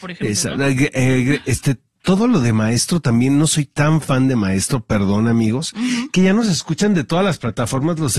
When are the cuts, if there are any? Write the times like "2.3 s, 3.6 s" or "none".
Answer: none